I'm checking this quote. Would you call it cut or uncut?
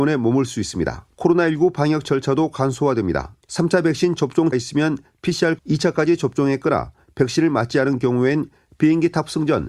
cut